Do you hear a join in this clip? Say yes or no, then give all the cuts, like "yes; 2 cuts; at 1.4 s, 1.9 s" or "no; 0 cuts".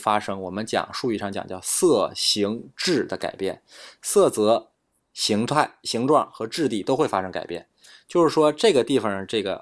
no; 0 cuts